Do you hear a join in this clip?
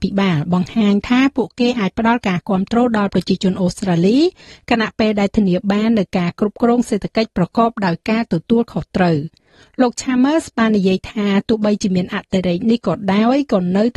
no; 0 cuts

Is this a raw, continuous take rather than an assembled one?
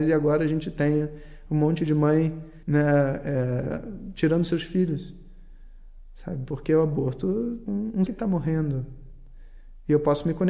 no; 3 cuts; at 2.6 s, 7.7 s, 8.1 s

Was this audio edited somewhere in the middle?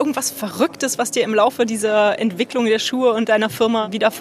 no; 0 cuts

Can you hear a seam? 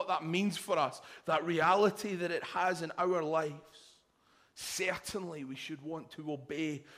no; 0 cuts

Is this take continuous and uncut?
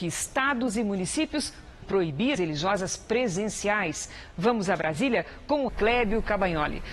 no; 3 cuts; at 1.8 s, 2.4 s, 5.7 s

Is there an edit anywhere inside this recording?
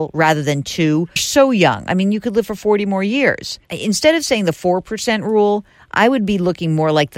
yes; 2 cuts; at 1.2 s, 3.6 s

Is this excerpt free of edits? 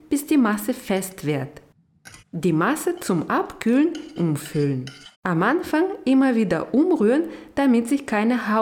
no; 3 cuts; at 2.2 s, 4.2 s, 5.1 s

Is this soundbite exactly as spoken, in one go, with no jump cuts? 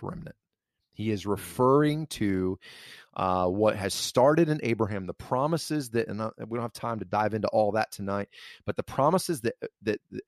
yes; 0 cuts

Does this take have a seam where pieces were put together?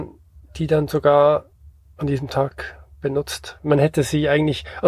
no; 0 cuts

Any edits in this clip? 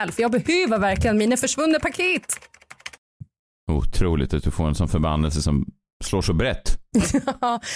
no; 0 cuts

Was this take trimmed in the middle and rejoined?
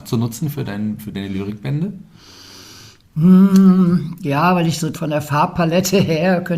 yes; 1 cut; at 4.9 s

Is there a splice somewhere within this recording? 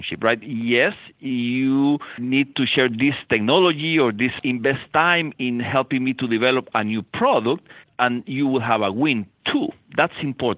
no; 0 cuts

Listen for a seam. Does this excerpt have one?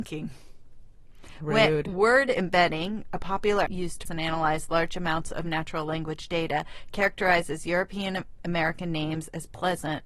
yes; 2 cuts; at 3.7 s, 4.1 s

